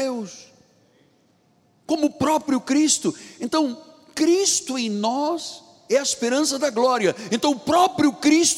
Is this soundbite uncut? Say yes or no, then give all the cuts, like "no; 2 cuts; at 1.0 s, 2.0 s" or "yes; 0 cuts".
yes; 0 cuts